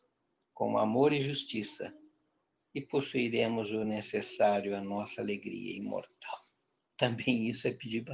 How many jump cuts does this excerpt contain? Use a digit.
0